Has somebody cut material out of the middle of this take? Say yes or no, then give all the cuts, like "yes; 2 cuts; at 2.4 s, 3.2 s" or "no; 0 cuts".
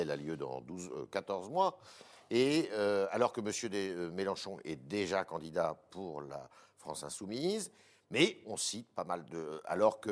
no; 0 cuts